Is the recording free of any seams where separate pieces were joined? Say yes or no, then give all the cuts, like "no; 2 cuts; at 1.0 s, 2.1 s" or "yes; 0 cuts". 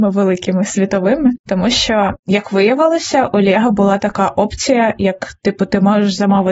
yes; 0 cuts